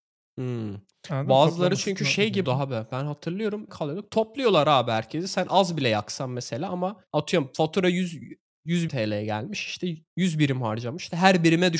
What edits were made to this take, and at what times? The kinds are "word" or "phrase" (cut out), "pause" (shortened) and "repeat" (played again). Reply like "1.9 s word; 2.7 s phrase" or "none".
2.4 s word; 3.7 s phrase; 7.1 s pause; 8.9 s word; 10.1 s pause